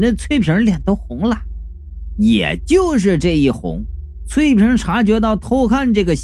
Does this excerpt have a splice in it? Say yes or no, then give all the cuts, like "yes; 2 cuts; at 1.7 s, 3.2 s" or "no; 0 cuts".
no; 0 cuts